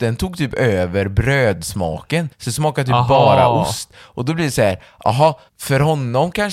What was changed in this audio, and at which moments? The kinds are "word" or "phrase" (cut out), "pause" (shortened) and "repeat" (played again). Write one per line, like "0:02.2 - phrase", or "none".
0:02.3 - pause
0:05.5 - pause